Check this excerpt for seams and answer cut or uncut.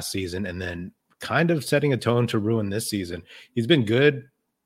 uncut